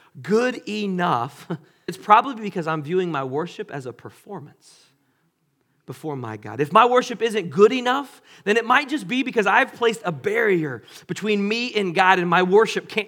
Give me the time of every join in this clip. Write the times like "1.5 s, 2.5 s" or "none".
1.9 s